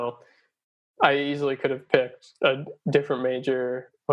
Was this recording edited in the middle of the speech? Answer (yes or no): no